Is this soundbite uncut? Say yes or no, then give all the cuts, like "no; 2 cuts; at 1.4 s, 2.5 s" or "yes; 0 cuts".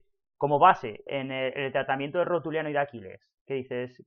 no; 1 cut; at 1.1 s